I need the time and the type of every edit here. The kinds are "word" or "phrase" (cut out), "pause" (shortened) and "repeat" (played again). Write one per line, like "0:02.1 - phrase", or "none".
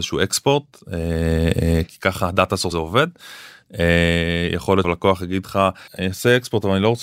0:01.9 - word
0:02.7 - word
0:04.8 - word
0:05.9 - pause